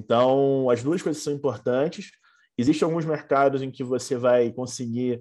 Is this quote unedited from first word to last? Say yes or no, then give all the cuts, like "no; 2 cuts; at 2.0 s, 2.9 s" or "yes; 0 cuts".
yes; 0 cuts